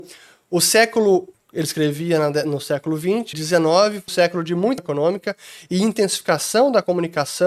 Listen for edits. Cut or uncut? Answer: cut